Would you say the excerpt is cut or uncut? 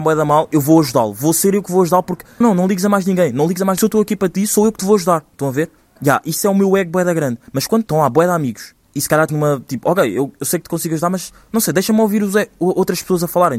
cut